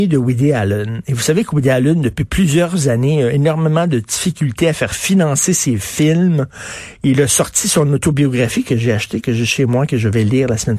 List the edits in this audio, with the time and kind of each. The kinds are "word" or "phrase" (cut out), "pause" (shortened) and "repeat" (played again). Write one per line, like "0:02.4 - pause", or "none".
none